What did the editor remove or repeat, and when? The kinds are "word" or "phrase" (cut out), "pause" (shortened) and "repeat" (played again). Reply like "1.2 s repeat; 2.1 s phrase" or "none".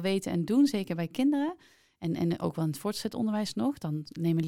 none